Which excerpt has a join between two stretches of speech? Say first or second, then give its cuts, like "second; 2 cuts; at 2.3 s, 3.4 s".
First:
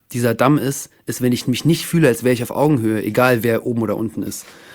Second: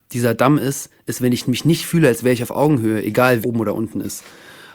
second; 1 cut; at 3.4 s